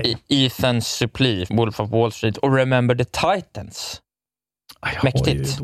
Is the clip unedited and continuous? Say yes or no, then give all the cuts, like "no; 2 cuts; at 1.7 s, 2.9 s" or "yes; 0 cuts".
no; 1 cut; at 1.5 s